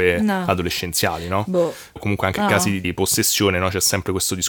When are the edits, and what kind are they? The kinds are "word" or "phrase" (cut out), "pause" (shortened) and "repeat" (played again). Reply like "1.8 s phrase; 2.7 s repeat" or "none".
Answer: 2.4 s word; 2.8 s word